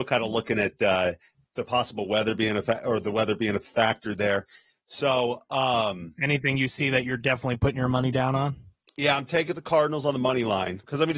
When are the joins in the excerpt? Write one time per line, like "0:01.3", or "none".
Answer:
none